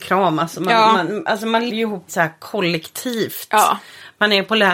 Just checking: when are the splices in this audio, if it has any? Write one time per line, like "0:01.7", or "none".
0:01.7
0:02.1

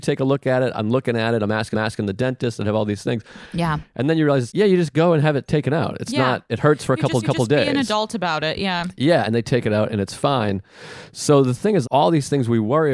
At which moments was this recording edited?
0:01.7
0:04.5
0:07.2
0:11.8

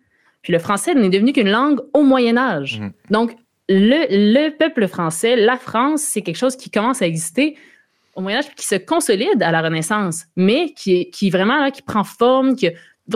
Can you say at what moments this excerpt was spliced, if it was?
none

